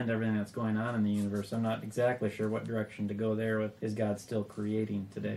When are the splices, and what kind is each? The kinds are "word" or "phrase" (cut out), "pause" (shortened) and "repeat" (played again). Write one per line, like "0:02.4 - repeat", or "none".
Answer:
0:03.8 - pause